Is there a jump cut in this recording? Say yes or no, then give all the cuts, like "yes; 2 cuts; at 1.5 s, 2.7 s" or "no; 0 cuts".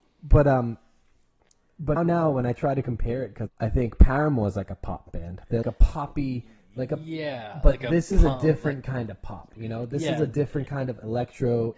yes; 3 cuts; at 2.0 s, 3.5 s, 5.6 s